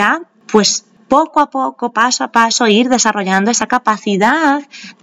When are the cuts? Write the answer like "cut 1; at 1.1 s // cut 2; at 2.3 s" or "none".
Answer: none